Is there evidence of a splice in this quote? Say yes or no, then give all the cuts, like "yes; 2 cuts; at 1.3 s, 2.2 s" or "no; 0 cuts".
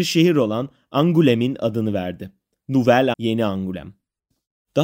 yes; 1 cut; at 3.1 s